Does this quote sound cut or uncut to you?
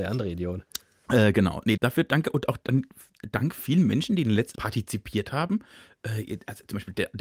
cut